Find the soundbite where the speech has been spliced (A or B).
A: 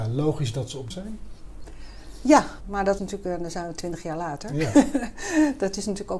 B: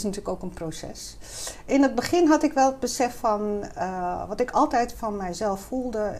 A